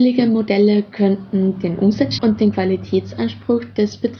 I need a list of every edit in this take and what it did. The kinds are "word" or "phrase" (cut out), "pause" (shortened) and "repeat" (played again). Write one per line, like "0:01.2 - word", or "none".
0:02.2 - word